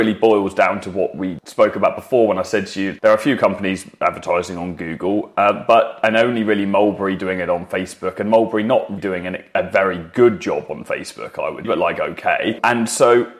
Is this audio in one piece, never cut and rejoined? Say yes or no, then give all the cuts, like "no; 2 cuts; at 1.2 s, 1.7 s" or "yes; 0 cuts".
no; 2 cuts; at 9.0 s, 11.6 s